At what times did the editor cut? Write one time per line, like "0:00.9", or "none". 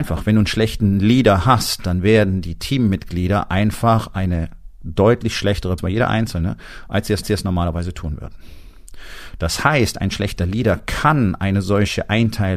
0:05.8
0:07.2